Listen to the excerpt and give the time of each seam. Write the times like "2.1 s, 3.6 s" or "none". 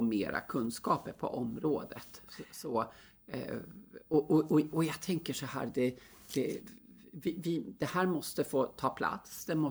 none